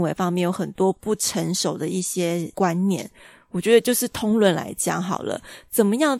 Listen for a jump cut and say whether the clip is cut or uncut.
uncut